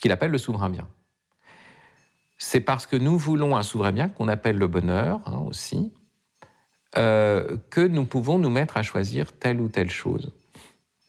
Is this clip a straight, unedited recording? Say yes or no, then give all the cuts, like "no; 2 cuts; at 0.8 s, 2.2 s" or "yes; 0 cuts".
yes; 0 cuts